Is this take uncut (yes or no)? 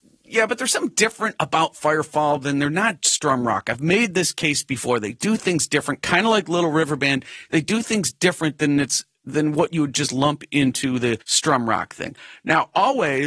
no